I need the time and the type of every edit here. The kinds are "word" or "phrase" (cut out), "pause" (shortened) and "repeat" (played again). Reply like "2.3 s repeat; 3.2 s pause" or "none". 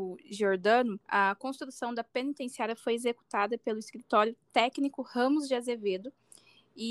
1.0 s pause

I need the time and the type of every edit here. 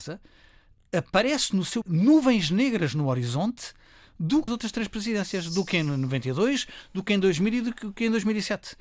1.8 s phrase; 4.5 s phrase

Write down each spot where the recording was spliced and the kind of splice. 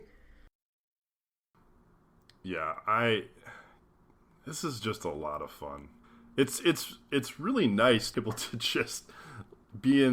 6.0 s pause; 8.1 s word

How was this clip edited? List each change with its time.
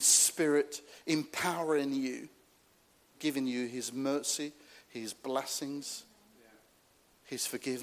3.1 s word

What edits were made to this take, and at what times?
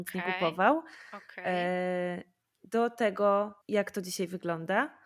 3.6 s pause

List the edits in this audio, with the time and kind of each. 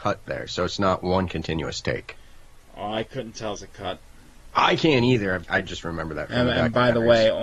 2.6 s pause; 3.6 s phrase; 5.4 s word

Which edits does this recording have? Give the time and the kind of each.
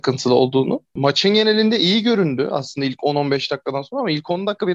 none

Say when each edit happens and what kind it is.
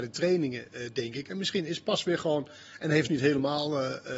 3.1 s phrase

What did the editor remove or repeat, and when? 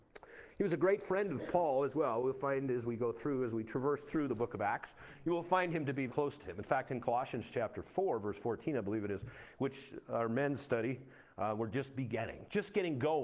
6.1 s word

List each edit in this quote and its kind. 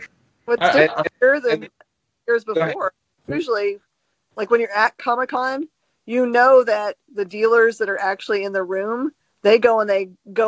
1.1 s pause; 3.1 s pause

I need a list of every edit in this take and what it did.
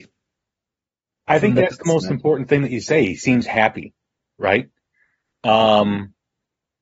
none

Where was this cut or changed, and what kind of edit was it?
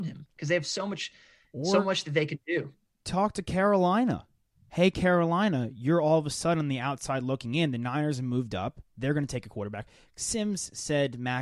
none

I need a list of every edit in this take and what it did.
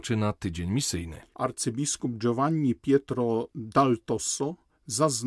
none

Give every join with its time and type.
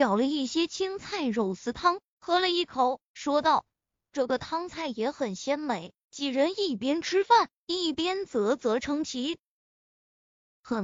6.0 s pause

